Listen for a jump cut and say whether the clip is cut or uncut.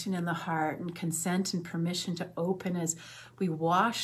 uncut